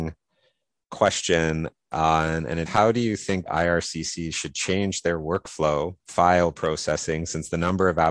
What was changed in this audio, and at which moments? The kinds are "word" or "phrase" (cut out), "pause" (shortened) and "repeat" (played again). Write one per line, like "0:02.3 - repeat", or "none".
0:02.7 - word
0:03.5 - word
0:06.1 - word